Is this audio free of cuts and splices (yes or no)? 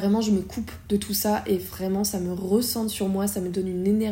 yes